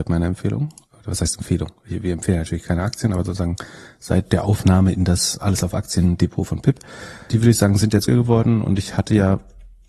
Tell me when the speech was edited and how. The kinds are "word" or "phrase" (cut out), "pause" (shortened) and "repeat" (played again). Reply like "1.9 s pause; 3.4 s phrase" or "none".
8.1 s word

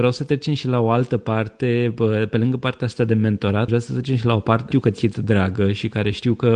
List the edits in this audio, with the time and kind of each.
3.7 s word; 4.7 s phrase; 5.1 s word

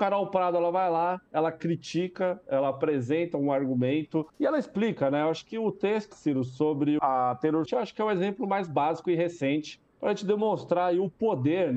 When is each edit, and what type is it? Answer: 4.3 s pause; 6.1 s word; 7.0 s word; 7.7 s word; 9.9 s pause

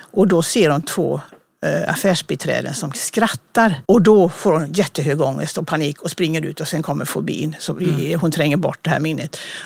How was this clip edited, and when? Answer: 3.8 s pause

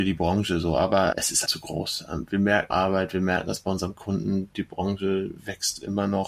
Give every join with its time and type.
1.1 s word; 1.5 s word; 2.7 s phrase

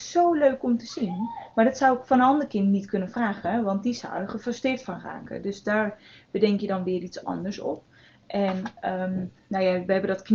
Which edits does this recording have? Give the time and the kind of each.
none

